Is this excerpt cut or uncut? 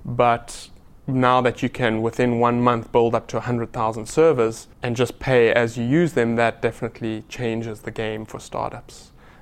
cut